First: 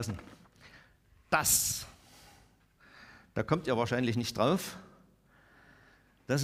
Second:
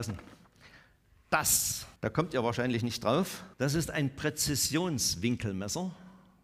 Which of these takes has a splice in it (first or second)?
second